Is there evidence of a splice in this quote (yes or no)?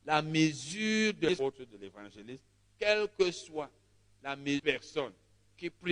no